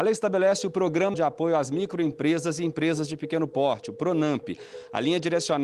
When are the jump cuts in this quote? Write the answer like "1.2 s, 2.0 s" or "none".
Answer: 1.1 s